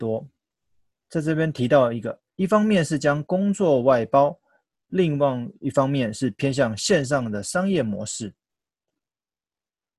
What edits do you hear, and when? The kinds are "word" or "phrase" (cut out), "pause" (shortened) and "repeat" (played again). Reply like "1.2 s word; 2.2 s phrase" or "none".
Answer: none